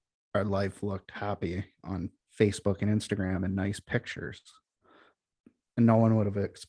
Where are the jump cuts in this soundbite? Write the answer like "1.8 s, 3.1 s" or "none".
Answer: 2.2 s